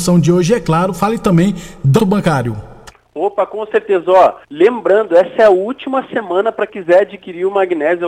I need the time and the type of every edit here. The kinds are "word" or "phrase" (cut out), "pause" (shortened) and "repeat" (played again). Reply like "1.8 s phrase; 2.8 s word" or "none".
2.0 s phrase; 4.4 s pause; 6.7 s word